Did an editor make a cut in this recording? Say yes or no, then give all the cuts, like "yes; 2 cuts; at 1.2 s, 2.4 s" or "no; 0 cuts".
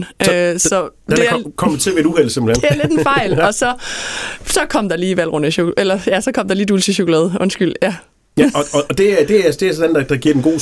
no; 0 cuts